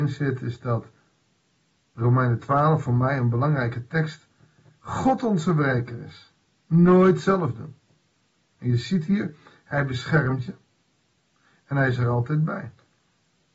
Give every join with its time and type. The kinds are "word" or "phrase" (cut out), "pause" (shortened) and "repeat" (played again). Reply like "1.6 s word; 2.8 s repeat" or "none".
none